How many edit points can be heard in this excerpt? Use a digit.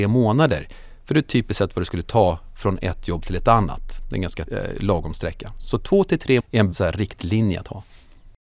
3